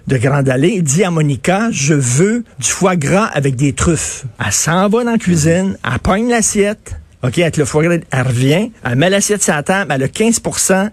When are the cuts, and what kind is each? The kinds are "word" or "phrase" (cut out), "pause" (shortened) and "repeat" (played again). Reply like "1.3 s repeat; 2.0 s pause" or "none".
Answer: 2.5 s pause; 4.3 s pause; 8.8 s pause